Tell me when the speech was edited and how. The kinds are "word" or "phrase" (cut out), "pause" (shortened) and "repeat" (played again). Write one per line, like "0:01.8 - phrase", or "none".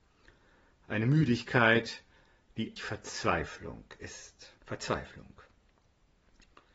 0:02.8 - word
0:04.6 - pause